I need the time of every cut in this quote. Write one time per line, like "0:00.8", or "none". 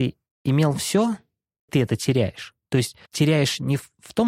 0:01.7
0:03.1